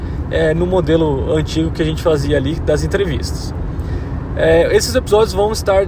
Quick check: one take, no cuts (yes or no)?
yes